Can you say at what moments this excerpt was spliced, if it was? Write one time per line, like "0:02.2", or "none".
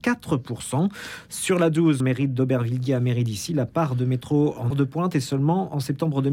0:02.0
0:04.7